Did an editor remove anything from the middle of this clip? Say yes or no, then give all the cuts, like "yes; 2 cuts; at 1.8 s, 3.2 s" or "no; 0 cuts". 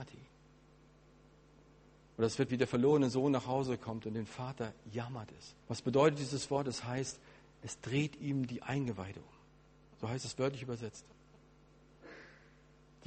yes; 2 cuts; at 2.5 s, 5.6 s